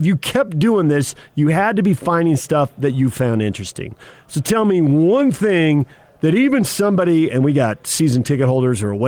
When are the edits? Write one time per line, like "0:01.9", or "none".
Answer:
none